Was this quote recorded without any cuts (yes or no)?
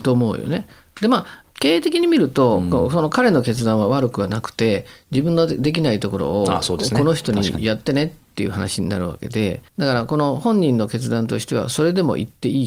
no